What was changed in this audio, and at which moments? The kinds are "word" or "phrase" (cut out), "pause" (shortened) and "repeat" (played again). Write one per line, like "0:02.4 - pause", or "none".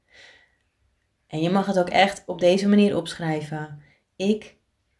none